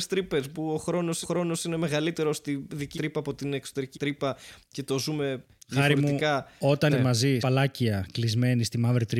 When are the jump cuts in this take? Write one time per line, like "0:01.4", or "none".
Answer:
0:01.2
0:02.9
0:03.9
0:06.9
0:07.4